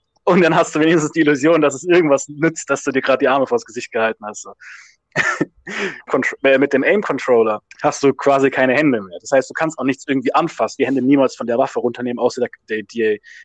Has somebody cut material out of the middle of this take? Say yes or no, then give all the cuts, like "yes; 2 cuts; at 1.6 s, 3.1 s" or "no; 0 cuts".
yes; 3 cuts; at 6.1 s, 7.7 s, 10.8 s